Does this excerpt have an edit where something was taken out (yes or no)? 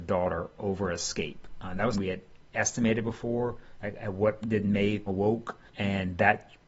yes